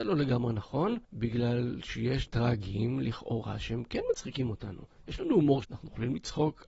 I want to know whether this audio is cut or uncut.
cut